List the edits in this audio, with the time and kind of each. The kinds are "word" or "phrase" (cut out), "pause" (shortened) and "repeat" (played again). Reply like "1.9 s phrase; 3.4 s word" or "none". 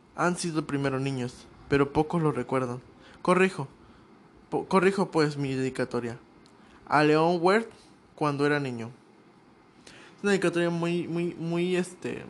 none